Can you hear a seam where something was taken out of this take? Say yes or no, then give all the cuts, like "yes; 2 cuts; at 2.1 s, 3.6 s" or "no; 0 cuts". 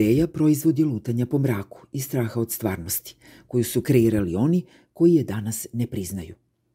no; 0 cuts